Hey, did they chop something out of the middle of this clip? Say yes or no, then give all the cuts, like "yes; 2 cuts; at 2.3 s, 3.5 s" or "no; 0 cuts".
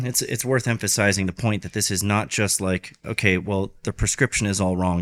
no; 0 cuts